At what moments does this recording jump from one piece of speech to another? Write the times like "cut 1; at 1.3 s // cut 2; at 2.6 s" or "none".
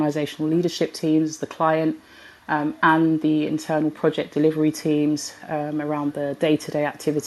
none